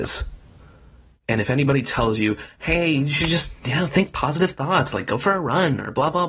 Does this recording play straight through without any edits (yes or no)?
yes